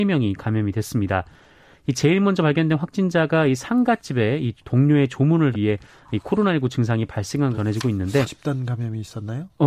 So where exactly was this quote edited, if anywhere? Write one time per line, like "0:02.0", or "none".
0:05.5
0:07.5
0:08.2